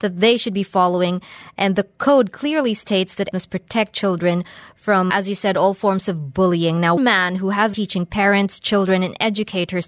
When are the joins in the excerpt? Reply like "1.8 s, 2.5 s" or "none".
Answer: 3.3 s, 5.1 s, 7.0 s, 7.7 s